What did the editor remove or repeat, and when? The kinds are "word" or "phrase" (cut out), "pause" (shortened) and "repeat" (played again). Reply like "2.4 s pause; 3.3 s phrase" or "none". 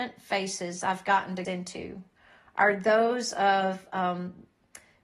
1.4 s word